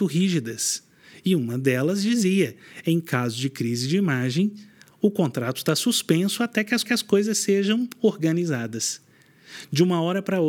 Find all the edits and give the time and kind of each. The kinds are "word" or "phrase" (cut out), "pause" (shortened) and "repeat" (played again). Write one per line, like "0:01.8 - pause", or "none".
0:06.8 - repeat

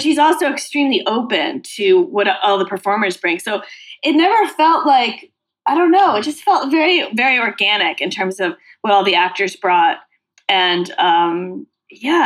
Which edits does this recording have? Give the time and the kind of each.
none

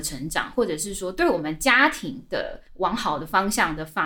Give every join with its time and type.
0:02.7 - pause

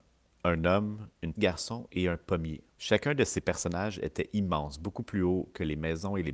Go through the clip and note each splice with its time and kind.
0:01.4 - phrase
0:02.7 - pause

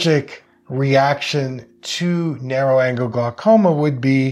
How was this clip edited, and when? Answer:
none

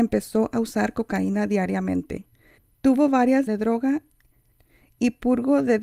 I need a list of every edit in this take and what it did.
0:03.5 - phrase

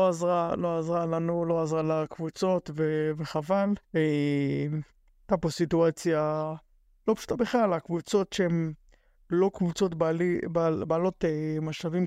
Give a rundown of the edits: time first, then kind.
0:03.8 - pause

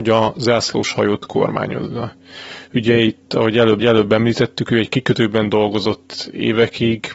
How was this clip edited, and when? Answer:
0:03.8 - repeat

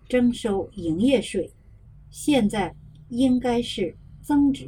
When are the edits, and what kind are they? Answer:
0:01.9 - pause

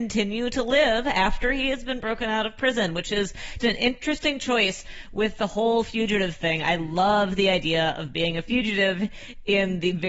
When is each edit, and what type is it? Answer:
0:03.6 - word

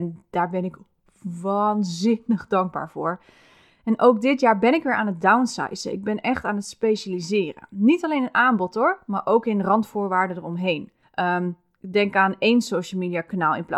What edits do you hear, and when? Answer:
0:11.0 - pause

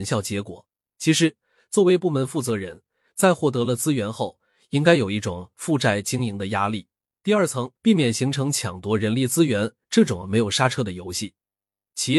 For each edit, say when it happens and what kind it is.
0:07.8 - pause

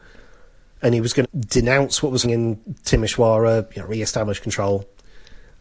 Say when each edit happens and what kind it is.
0:01.2 - word
0:02.2 - word

